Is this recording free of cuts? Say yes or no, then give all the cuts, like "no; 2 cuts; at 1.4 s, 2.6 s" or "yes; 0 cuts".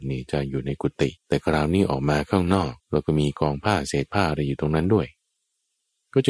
no; 2 cuts; at 1.2 s, 2.8 s